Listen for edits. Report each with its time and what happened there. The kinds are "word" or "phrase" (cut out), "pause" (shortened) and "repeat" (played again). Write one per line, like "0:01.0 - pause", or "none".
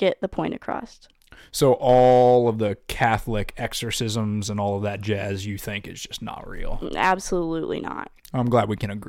none